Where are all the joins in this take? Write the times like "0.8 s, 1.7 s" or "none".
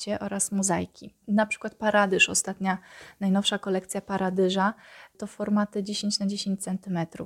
1.2 s